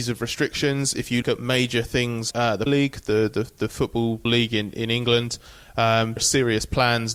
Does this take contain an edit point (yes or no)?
yes